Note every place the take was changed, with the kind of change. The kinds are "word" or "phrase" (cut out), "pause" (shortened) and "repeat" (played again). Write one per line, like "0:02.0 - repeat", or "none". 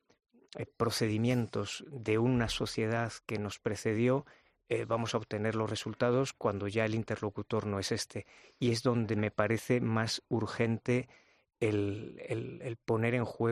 none

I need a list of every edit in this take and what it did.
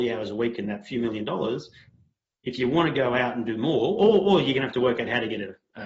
none

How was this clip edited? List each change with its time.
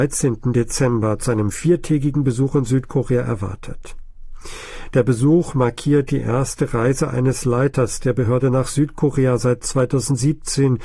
none

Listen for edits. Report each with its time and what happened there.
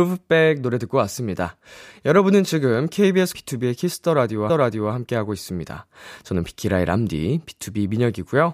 0:03.3 - word
0:04.5 - repeat

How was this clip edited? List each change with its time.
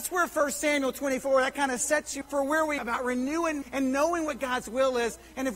0:02.2 - word
0:02.8 - word
0:03.6 - word

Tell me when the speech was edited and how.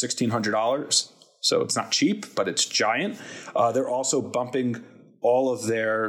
none

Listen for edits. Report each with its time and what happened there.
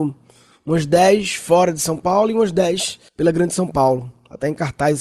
0:03.1 - pause

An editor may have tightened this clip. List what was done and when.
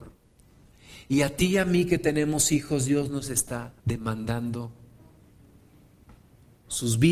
0:03.8 - pause

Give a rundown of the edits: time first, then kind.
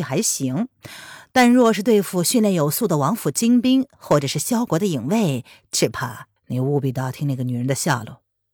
0:06.4 - pause

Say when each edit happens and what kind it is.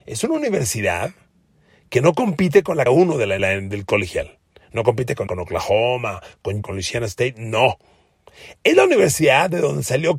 0:02.9 - word
0:03.4 - word
0:05.3 - word
0:06.6 - word

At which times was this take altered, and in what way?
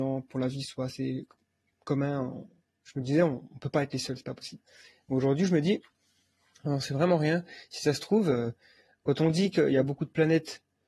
none

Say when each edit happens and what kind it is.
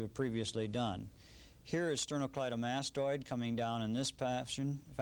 none

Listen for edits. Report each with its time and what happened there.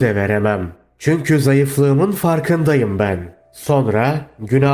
none

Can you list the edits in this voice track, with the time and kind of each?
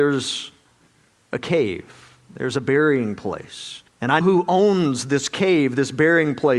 0:03.9 - pause
0:04.2 - word

